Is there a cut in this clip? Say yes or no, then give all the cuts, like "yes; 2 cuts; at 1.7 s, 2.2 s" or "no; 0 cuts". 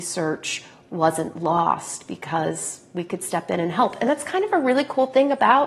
no; 0 cuts